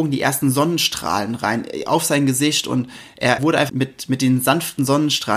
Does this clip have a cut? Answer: yes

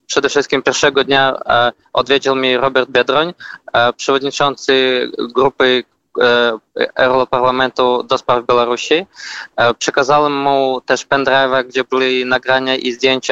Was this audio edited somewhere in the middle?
no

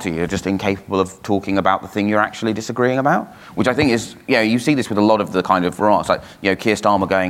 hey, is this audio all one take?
yes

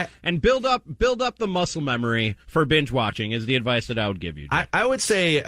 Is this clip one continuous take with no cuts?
no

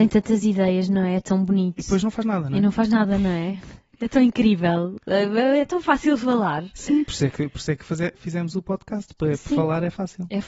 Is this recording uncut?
yes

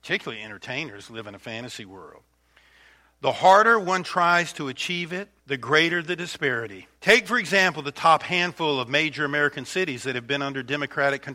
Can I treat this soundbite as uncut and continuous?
no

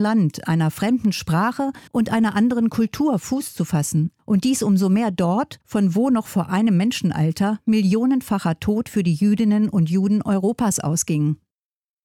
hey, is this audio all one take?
no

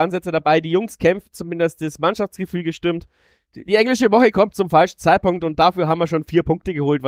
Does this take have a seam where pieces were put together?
no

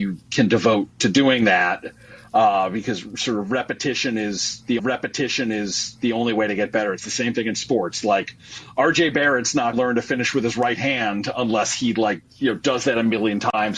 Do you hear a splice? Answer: yes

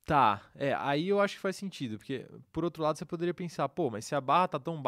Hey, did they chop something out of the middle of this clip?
no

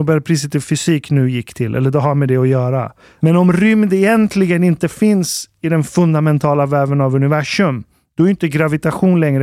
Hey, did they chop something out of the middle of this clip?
no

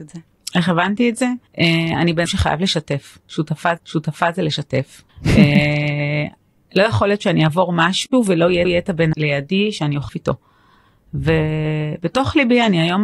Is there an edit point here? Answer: yes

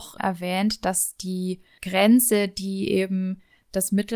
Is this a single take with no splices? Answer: yes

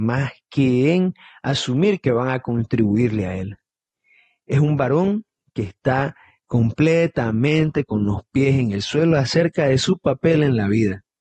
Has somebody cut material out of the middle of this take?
no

